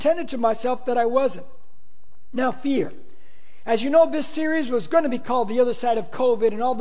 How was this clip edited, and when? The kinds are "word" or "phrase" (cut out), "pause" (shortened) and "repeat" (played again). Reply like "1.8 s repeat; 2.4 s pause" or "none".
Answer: none